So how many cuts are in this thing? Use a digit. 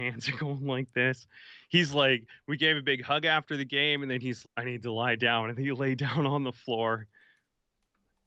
1